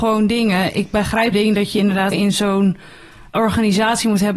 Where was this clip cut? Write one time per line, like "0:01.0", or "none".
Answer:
0:01.3
0:02.1
0:03.3